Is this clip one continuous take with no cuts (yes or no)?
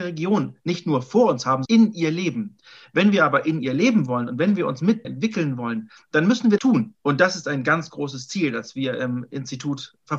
no